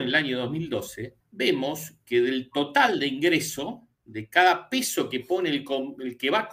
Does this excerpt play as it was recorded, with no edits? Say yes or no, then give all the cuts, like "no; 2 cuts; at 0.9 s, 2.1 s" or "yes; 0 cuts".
no; 2 cuts; at 1.2 s, 3.9 s